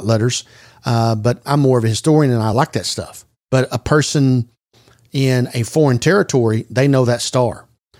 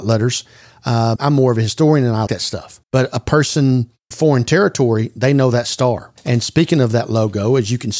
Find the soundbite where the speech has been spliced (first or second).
second